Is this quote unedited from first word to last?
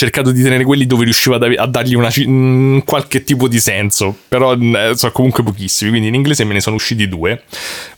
yes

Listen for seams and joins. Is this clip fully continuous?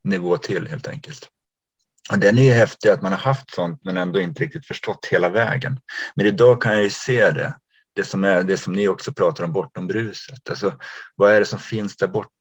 yes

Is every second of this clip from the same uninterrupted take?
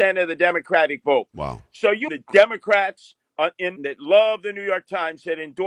no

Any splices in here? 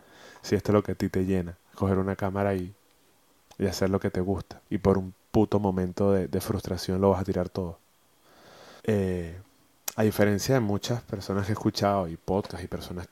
yes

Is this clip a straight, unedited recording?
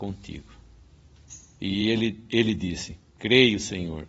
yes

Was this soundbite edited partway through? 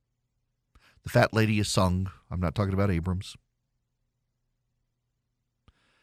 no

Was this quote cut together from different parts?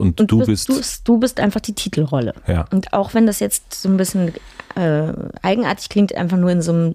no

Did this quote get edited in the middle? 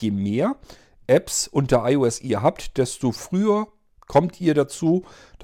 no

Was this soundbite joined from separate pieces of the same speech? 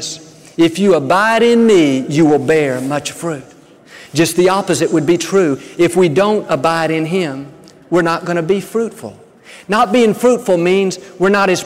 no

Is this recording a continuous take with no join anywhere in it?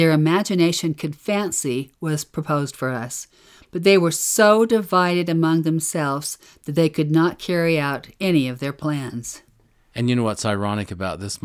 yes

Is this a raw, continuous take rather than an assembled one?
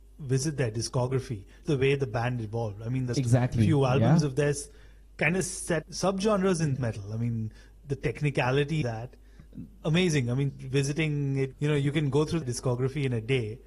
no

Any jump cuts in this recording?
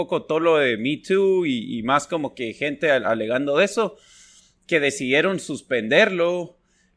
no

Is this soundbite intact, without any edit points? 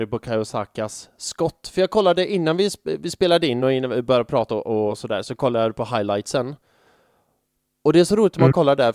yes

